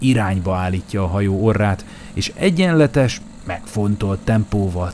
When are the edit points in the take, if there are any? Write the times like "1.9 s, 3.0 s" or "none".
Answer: none